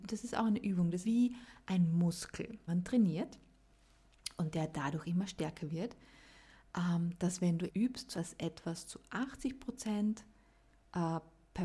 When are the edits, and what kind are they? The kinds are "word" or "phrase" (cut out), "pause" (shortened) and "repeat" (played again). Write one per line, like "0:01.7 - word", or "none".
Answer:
0:01.0 - word
0:02.7 - word
0:07.7 - word
0:08.1 - word